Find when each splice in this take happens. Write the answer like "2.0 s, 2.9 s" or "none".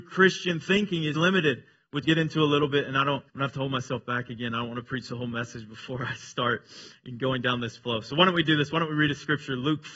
1.1 s, 2.0 s, 3.3 s